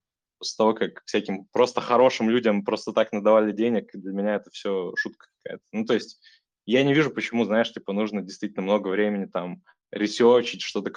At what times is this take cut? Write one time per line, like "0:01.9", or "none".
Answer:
none